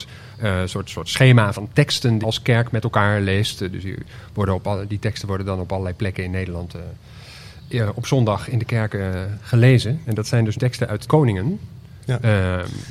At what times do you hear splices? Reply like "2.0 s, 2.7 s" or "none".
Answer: 1.5 s, 2.2 s, 10.5 s, 11.1 s